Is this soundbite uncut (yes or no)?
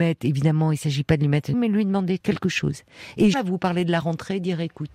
no